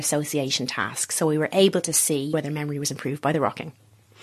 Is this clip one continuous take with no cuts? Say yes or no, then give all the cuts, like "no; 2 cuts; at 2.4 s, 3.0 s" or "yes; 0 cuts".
yes; 0 cuts